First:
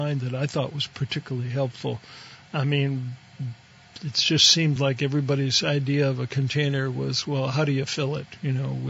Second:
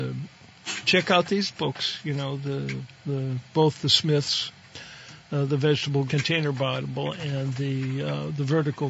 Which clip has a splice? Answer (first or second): second